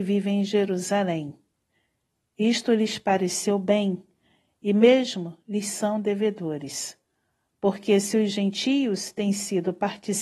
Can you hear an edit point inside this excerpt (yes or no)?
no